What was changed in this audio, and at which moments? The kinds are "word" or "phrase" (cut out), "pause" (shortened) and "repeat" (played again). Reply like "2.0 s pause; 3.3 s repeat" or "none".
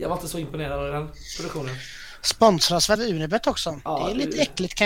3.0 s word